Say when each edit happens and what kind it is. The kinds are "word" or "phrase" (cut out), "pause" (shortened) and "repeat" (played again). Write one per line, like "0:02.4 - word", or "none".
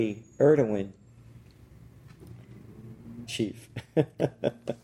0:03.3 - phrase